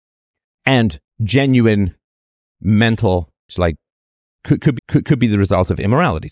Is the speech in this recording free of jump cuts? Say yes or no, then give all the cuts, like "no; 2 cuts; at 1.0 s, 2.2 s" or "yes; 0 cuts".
no; 3 cuts; at 1.1 s, 3.5 s, 4.8 s